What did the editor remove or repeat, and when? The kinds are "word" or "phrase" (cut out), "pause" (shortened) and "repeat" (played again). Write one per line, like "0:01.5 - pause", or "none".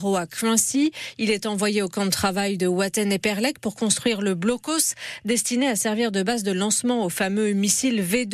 none